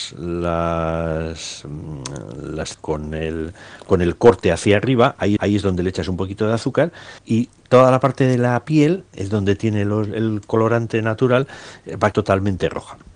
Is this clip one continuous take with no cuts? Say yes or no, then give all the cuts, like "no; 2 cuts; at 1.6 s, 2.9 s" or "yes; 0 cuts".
no; 4 cuts; at 2.7 s, 5.4 s, 7.2 s, 12.1 s